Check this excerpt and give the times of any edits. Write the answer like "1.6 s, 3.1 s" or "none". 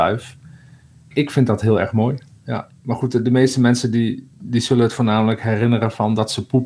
1.1 s